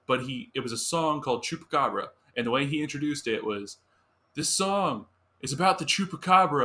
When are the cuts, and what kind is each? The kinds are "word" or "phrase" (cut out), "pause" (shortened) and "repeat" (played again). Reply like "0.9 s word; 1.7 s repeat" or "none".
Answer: none